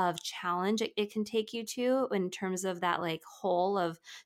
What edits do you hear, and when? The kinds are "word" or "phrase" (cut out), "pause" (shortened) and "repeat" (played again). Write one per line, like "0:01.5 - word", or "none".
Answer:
none

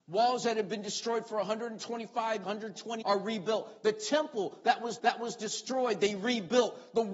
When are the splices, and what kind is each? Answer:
0:02.4 - word
0:03.0 - word
0:05.0 - repeat

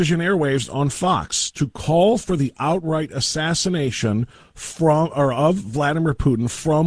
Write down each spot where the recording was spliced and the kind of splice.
none

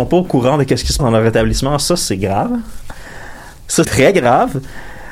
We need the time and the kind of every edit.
0:01.0 - word
0:03.8 - word

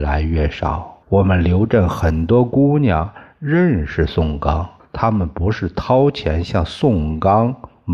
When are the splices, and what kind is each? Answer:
0:01.0 - pause
0:04.8 - pause

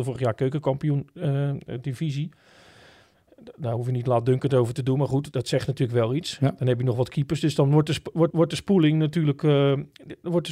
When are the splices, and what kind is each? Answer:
0:05.3 - word
0:08.3 - repeat

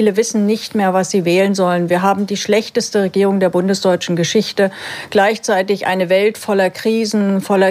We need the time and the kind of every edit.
none

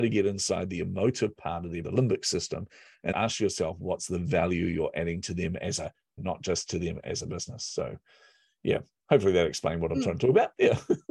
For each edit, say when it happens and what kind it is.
0:01.8 - word
0:03.1 - word
0:06.2 - word

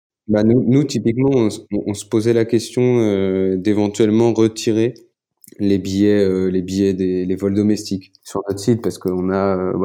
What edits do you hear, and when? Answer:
0:05.1 - pause
0:08.2 - word

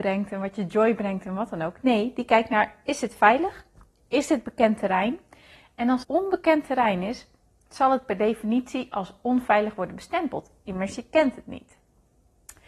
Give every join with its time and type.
0:06.0 - word

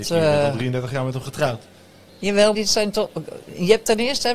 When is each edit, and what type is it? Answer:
0:02.5 - word

